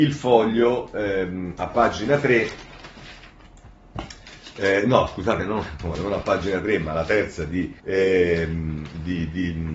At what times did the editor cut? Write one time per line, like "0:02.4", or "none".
0:05.9
0:07.8